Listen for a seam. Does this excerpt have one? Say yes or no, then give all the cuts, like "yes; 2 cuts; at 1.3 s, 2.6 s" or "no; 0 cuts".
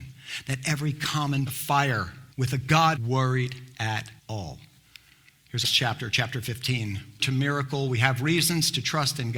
yes; 6 cuts; at 1.5 s, 2.3 s, 3.0 s, 4.2 s, 5.6 s, 7.2 s